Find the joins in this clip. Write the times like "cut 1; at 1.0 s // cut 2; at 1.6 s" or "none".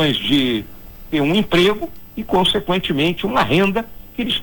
none